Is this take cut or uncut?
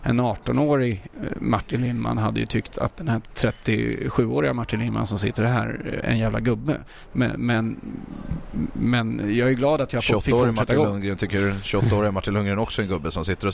cut